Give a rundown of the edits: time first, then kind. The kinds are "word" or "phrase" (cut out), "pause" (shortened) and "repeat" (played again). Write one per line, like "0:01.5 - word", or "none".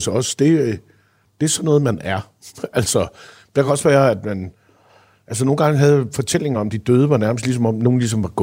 none